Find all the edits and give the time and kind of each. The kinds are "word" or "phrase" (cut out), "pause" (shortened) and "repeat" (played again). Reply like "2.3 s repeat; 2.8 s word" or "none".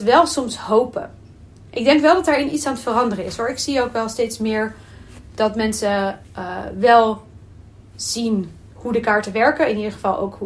8.7 s pause